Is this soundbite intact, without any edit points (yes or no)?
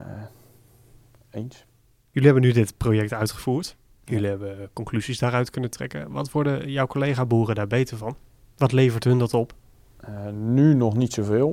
yes